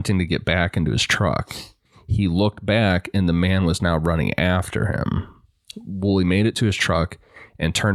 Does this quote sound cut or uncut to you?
uncut